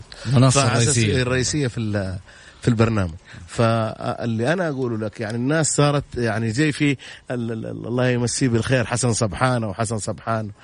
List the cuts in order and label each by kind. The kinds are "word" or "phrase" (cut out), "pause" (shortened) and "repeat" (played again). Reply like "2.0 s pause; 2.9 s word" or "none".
none